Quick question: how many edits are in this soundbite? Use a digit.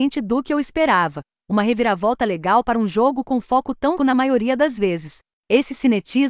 1